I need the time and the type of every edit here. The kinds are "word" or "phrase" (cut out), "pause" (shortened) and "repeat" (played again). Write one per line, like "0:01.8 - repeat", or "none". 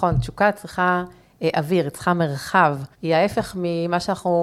0:02.9 - pause